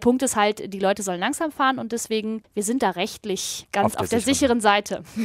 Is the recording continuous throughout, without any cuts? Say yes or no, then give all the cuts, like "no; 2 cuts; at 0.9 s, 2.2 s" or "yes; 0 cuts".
yes; 0 cuts